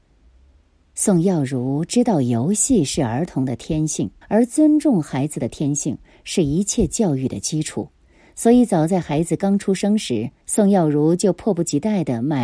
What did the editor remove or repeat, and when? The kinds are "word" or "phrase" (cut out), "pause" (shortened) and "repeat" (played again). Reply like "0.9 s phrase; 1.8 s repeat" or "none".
4.2 s pause; 10.4 s pause